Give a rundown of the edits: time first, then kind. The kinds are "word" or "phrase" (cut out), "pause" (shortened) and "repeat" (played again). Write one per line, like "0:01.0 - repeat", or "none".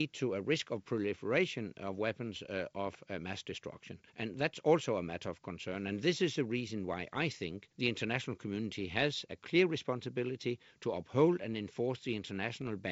0:04.1 - pause
0:07.7 - pause